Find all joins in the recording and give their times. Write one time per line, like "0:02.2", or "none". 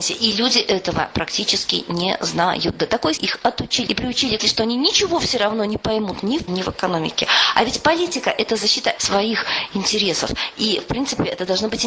0:03.2
0:03.9
0:04.4
0:06.5
0:09.0